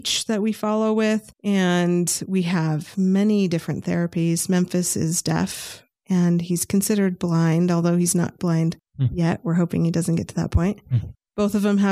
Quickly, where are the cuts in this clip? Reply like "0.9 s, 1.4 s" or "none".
1.3 s, 8.4 s